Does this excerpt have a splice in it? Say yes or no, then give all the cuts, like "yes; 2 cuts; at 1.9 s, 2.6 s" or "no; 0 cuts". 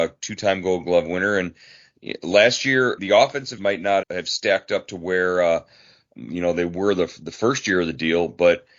yes; 4 cuts; at 3.0 s, 3.6 s, 4.0 s, 6.1 s